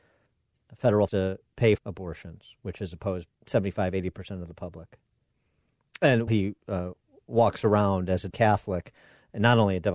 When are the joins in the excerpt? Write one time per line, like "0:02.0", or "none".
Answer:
0:01.1
0:01.8
0:03.3
0:06.3
0:08.3